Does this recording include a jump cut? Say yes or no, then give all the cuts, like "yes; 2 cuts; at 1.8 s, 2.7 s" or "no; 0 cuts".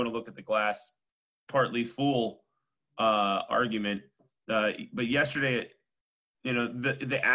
no; 0 cuts